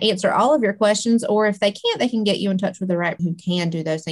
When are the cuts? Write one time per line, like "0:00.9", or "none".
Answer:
0:03.2